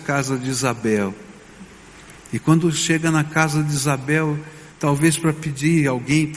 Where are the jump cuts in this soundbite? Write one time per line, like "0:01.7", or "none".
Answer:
0:04.7